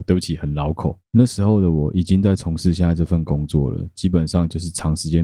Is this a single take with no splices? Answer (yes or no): yes